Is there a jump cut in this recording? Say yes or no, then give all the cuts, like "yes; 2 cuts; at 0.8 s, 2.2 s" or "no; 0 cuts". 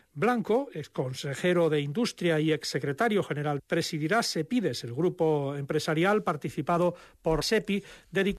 yes; 2 cuts; at 3.6 s, 7.4 s